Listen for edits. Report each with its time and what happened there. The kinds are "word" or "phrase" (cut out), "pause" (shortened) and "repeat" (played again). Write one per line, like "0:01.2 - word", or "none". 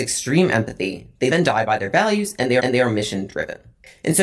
0:01.3 - word
0:02.6 - repeat